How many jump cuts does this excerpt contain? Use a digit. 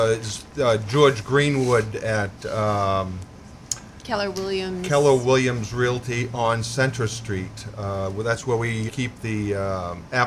1